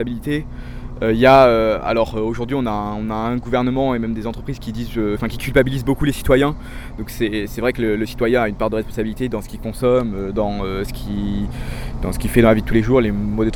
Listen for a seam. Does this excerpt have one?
no; 0 cuts

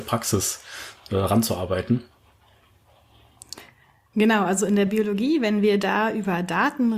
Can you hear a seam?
no; 0 cuts

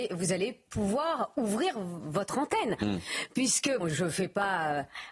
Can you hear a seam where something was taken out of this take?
yes; 1 cut; at 3.8 s

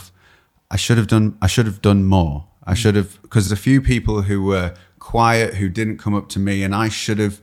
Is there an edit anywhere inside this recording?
yes; 1 cut; at 3.5 s

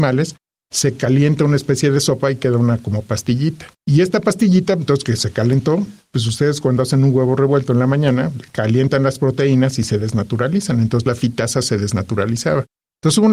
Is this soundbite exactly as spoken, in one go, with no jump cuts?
no; 1 cut; at 3.7 s

